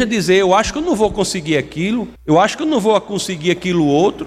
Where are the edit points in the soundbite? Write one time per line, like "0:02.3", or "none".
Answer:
0:02.2